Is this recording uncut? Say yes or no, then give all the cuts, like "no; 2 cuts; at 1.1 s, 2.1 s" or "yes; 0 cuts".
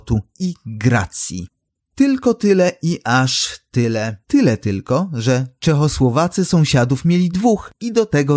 yes; 0 cuts